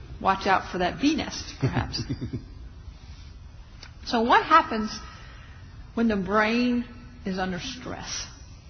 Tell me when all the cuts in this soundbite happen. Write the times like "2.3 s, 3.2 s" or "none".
none